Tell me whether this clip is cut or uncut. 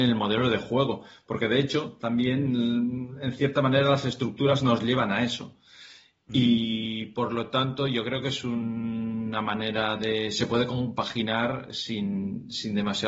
uncut